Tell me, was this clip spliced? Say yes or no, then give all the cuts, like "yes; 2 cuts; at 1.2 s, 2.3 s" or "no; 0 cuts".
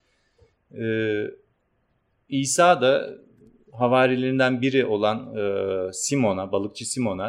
no; 0 cuts